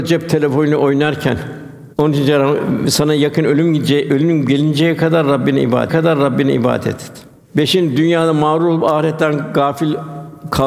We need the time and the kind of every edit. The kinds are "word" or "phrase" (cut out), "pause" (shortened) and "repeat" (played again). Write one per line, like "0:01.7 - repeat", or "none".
0:01.9 - pause
0:05.9 - repeat